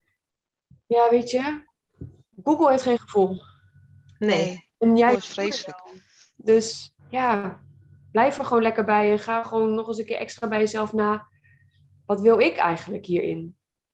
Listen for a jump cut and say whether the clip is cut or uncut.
uncut